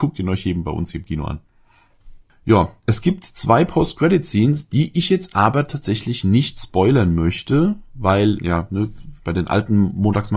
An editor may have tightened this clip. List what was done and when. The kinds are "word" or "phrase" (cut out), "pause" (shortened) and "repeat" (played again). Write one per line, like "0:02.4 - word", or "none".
0:08.4 - word